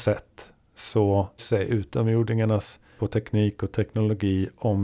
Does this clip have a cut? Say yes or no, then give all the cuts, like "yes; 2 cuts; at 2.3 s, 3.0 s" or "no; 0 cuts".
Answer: yes; 2 cuts; at 1.4 s, 3.0 s